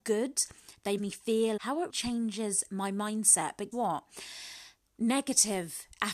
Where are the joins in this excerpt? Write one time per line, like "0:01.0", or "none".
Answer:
0:01.0
0:01.6
0:01.9
0:03.7